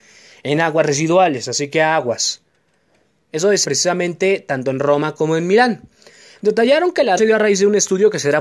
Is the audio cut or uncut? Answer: cut